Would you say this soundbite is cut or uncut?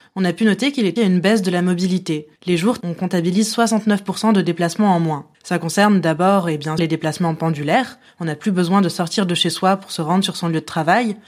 cut